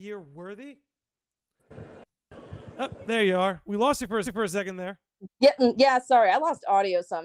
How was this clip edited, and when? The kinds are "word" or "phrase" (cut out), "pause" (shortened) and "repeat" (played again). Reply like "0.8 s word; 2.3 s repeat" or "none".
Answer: 4.2 s repeat; 5.3 s pause